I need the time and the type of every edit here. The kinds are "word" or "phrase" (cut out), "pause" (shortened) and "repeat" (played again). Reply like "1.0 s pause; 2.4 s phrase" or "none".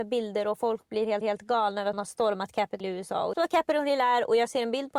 1.2 s repeat; 1.9 s phrase; 2.8 s word; 3.3 s phrase